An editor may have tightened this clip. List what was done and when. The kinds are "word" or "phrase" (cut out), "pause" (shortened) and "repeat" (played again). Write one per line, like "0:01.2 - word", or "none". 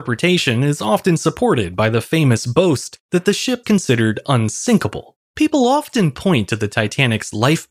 0:03.6 - word
0:05.2 - pause